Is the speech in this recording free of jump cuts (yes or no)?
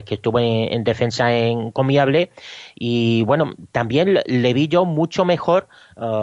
yes